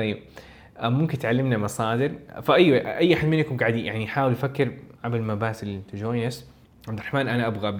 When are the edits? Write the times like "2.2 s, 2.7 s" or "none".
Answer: 4.9 s, 6.6 s